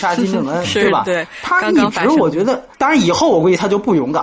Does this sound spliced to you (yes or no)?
yes